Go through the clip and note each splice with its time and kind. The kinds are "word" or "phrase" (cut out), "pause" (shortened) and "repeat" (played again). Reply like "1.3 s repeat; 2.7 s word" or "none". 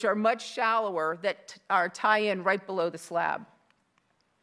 none